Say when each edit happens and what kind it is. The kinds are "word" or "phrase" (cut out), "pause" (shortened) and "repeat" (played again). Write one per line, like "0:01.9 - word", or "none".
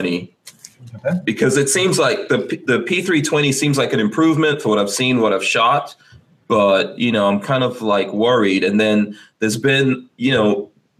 none